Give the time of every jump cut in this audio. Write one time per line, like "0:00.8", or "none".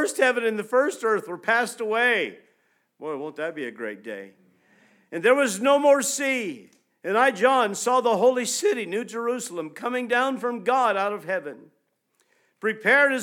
none